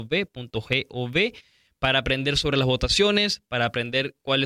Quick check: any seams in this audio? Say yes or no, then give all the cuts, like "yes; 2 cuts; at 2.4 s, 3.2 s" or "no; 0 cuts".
no; 0 cuts